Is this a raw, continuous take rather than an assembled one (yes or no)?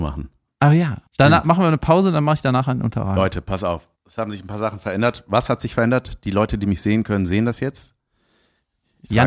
no